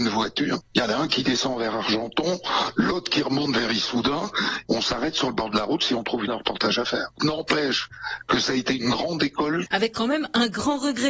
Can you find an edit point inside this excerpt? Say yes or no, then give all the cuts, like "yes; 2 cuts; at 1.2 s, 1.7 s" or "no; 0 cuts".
yes; 1 cut; at 6.3 s